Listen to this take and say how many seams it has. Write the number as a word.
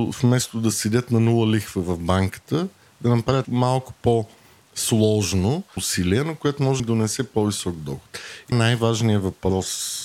four